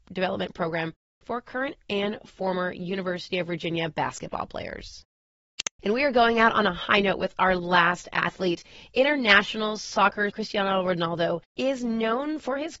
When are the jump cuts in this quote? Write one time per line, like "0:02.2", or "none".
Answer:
0:05.7
0:10.3
0:11.5